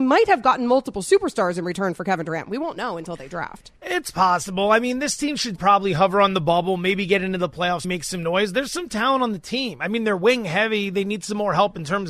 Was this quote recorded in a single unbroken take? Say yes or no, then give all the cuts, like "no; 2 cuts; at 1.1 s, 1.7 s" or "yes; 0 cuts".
no; 3 cuts; at 3.8 s, 5.6 s, 7.8 s